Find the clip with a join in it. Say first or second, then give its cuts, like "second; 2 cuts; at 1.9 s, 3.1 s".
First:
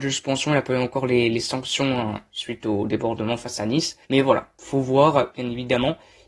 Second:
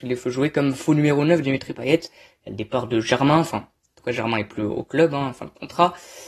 first; 1 cut; at 4.0 s